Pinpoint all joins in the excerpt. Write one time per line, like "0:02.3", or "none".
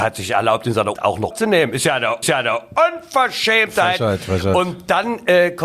0:00.9
0:01.3
0:02.2